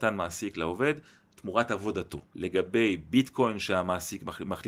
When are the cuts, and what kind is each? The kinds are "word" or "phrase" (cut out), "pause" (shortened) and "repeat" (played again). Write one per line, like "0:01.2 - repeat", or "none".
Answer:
none